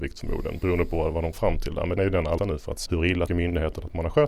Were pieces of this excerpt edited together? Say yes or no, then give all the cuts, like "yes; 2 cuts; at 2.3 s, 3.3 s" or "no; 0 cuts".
yes; 5 cuts; at 1.3 s, 2.0 s, 2.4 s, 2.9 s, 3.3 s